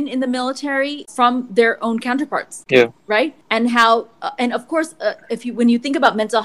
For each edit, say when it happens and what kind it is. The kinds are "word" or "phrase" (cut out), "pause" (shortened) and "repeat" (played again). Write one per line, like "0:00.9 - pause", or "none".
0:03.4 - pause